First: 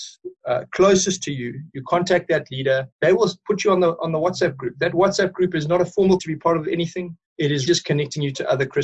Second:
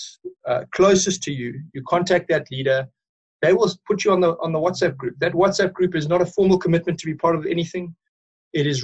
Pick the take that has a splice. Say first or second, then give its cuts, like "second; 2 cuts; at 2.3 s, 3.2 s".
first; 4 cuts; at 2.9 s, 6.2 s, 7.3 s, 7.7 s